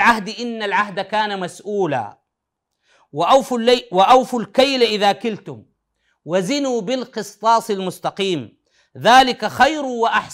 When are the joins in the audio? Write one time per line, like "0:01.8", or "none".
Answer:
none